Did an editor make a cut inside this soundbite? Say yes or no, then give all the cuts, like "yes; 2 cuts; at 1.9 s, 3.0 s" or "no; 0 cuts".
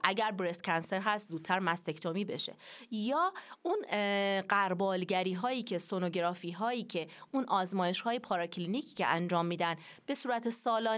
no; 0 cuts